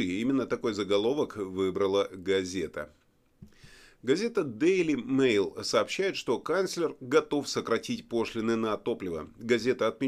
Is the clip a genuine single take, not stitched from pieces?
yes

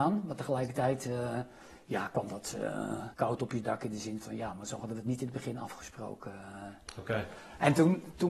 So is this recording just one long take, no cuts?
no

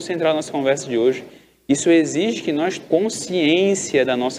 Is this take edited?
yes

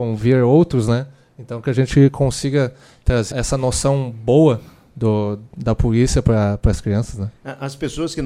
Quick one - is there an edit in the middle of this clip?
yes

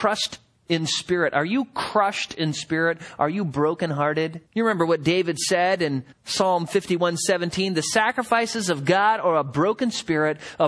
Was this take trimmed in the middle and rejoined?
yes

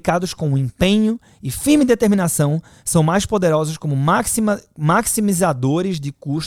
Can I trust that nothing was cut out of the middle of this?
yes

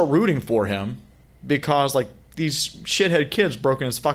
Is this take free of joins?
no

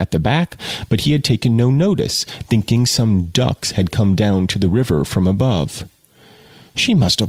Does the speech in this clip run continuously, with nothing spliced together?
yes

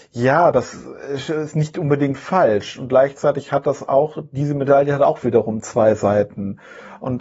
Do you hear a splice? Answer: no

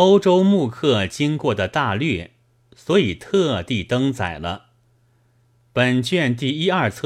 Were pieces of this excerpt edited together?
no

